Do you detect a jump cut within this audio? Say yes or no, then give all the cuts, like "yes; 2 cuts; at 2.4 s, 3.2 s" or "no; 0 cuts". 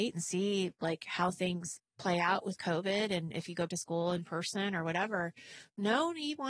yes; 1 cut; at 3.7 s